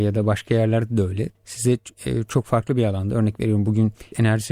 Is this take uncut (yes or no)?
yes